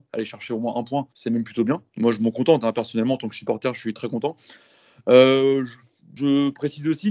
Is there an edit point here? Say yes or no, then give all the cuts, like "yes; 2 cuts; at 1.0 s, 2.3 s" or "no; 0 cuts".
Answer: yes; 3 cuts; at 1.1 s, 1.9 s, 6.2 s